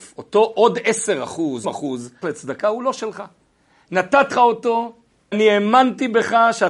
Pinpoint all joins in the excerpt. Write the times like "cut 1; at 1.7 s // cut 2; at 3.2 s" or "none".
cut 1; at 1.6 s // cut 2; at 2.2 s // cut 3; at 4.3 s // cut 4; at 5.3 s